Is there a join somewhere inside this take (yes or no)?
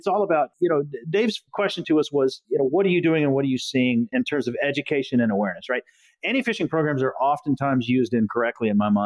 no